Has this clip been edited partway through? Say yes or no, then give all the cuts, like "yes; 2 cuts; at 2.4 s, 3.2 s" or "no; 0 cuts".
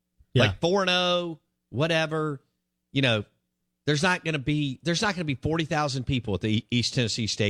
no; 0 cuts